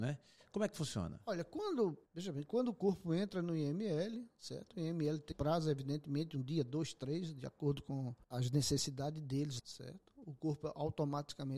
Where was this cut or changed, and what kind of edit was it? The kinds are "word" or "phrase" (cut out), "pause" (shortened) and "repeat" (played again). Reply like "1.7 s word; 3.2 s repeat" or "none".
2.1 s pause; 5.3 s word; 8.2 s pause; 9.6 s word